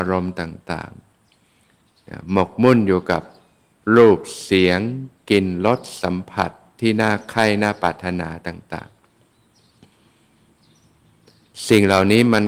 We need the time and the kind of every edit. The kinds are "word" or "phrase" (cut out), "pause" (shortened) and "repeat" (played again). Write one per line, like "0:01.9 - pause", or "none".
none